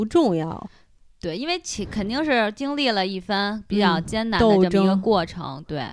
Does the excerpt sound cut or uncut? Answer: uncut